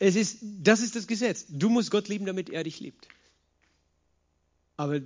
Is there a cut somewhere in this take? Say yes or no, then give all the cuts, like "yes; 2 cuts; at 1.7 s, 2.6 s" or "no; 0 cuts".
no; 0 cuts